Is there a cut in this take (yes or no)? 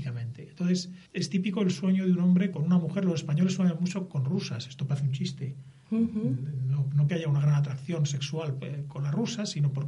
yes